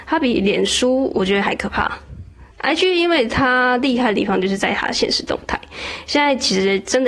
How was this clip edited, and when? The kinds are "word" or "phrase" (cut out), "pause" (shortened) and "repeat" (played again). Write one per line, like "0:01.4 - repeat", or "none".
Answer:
0:02.5 - pause